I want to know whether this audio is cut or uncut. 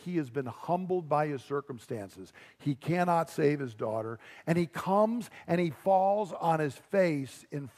uncut